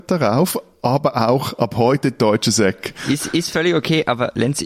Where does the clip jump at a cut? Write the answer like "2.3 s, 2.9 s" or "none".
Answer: none